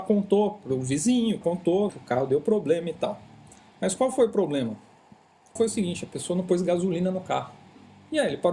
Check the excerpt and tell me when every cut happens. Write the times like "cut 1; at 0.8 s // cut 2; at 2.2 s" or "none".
cut 1; at 1.4 s // cut 2; at 1.9 s // cut 3; at 5.6 s